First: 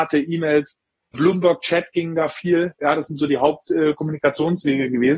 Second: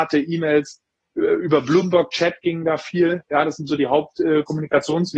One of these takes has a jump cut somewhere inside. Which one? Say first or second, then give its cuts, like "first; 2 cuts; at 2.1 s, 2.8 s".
first; 1 cut; at 1.1 s